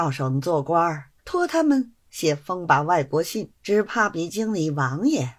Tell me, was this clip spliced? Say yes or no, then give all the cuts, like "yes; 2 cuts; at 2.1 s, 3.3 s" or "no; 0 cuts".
yes; 2 cuts; at 1.2 s, 3.6 s